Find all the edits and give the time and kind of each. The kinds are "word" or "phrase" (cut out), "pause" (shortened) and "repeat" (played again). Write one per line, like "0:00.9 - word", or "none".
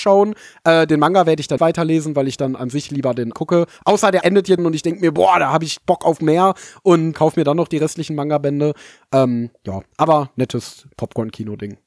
0:01.6 - word
0:03.3 - word
0:04.2 - word
0:04.6 - word
0:07.1 - word